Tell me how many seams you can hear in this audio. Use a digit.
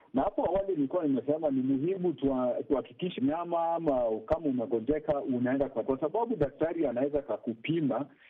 2